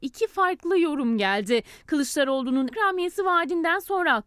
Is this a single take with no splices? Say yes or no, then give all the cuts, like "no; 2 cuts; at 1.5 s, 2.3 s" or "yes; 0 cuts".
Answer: no; 1 cut; at 2.7 s